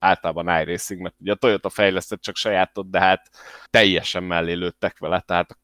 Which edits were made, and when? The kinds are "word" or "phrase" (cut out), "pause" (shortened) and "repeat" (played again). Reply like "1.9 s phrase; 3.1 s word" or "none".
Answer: 3.7 s pause